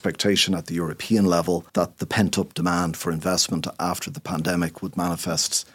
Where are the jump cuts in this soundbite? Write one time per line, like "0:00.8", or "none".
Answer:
0:01.7

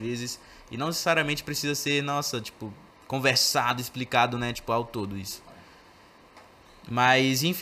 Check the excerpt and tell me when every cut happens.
none

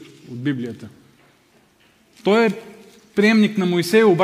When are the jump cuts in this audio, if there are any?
none

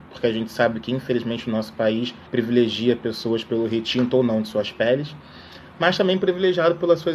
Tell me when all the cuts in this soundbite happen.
0:02.3

